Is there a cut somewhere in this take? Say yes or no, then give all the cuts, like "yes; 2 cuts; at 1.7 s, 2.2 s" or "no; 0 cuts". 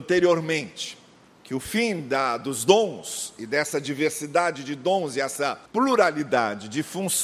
yes; 2 cuts; at 1.3 s, 5.7 s